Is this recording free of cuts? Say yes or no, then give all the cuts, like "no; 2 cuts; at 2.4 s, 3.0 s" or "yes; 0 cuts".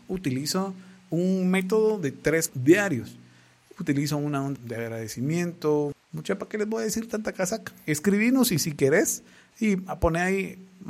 no; 3 cuts; at 2.5 s, 4.6 s, 6.0 s